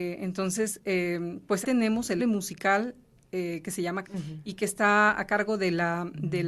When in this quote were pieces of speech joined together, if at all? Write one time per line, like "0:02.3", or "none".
0:01.6
0:02.2
0:04.0